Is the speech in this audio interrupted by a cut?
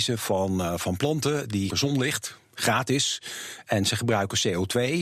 yes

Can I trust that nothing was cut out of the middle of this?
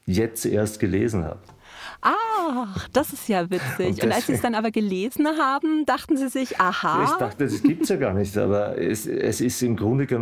yes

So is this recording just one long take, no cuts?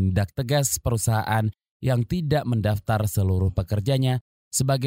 yes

